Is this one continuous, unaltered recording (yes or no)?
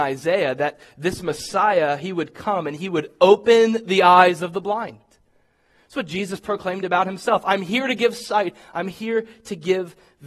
yes